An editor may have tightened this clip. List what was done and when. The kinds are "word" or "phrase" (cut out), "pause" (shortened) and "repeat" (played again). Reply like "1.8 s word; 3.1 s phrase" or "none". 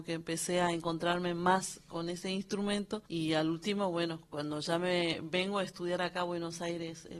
3.1 s pause